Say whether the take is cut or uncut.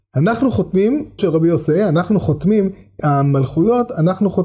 cut